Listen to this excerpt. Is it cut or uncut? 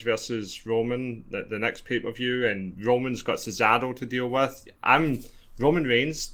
uncut